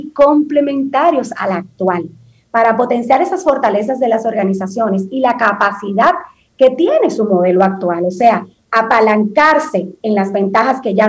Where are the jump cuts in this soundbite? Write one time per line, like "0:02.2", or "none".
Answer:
none